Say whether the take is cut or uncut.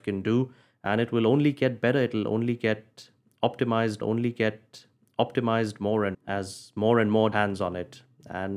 cut